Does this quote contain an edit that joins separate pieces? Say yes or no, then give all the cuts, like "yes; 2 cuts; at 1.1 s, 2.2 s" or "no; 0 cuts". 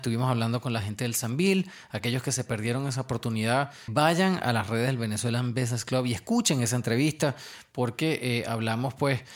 yes; 1 cut; at 3.9 s